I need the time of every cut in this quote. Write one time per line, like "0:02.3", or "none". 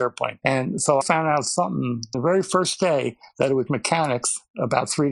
0:01.0
0:02.1
0:03.7